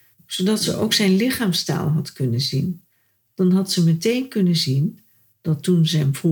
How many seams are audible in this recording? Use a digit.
0